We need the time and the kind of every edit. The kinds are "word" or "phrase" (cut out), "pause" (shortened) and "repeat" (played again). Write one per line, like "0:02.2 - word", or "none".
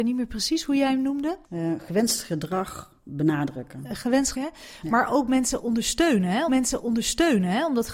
0:01.4 - pause
0:03.0 - pause
0:04.3 - phrase
0:06.5 - repeat

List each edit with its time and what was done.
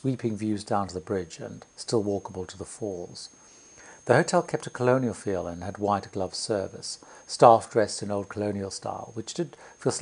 none

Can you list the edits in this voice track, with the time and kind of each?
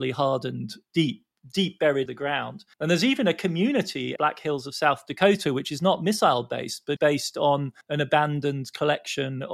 0:02.1 - word
0:02.7 - pause
0:04.2 - phrase
0:07.0 - word
0:07.8 - pause

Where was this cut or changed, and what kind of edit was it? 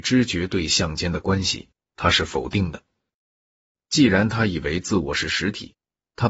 none

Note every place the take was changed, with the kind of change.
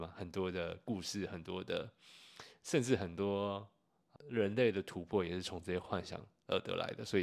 0:04.2 - word

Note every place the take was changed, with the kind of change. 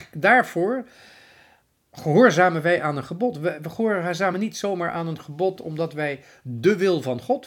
none

